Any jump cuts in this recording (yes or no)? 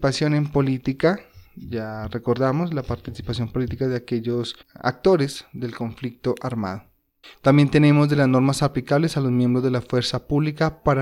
yes